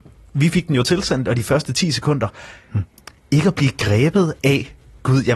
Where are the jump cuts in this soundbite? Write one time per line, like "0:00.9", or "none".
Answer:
none